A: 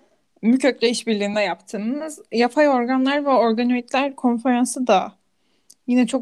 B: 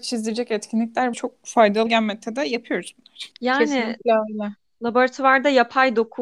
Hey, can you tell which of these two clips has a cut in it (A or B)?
B